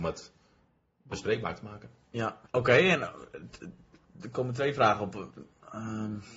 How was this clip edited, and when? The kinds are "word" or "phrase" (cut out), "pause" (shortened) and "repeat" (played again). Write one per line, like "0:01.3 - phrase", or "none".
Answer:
0:02.5 - pause